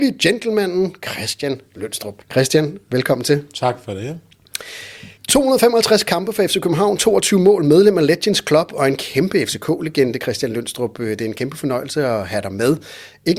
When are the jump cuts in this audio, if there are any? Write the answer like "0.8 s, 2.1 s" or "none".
2.2 s, 5.2 s